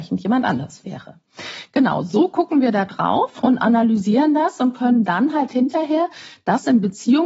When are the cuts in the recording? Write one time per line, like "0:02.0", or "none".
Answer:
none